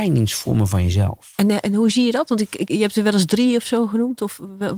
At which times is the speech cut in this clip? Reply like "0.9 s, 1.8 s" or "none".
2.7 s